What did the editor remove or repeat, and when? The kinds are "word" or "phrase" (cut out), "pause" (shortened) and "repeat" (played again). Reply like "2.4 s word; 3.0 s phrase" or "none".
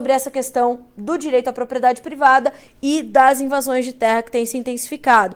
none